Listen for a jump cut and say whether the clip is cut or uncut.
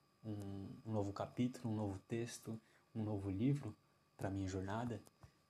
uncut